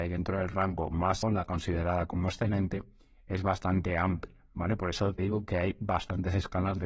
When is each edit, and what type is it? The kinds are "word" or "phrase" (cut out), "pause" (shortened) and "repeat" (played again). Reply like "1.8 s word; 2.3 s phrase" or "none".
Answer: 1.2 s word; 5.2 s word